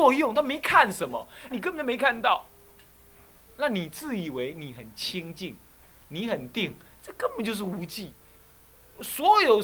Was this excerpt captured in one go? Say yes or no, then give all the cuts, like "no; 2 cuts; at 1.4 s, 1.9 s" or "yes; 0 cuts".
no; 1 cut; at 1.5 s